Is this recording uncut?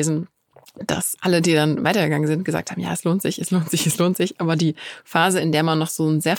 no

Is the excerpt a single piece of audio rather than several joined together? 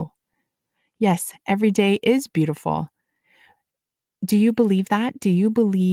yes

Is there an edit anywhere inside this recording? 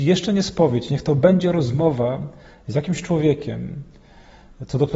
no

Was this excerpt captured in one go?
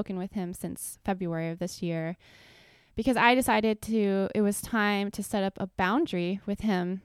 yes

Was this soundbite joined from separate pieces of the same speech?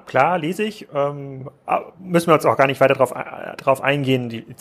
no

